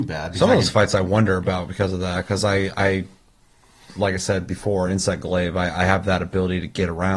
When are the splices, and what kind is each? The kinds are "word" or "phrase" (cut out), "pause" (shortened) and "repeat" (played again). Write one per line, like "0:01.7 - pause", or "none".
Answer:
none